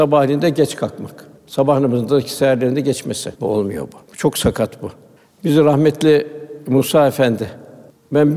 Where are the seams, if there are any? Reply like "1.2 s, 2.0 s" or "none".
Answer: 1.4 s, 3.3 s, 4.0 s, 5.2 s